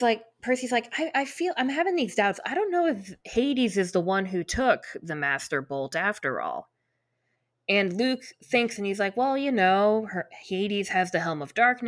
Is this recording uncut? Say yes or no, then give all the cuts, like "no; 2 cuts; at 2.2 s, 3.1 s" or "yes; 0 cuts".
no; 1 cut; at 8.8 s